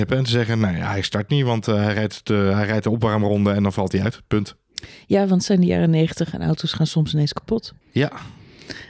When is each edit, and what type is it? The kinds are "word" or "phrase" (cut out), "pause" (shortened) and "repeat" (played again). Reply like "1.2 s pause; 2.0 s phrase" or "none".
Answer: 7.8 s pause